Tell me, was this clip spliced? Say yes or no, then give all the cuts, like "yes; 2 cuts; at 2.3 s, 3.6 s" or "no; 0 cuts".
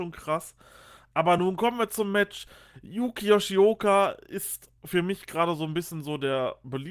no; 0 cuts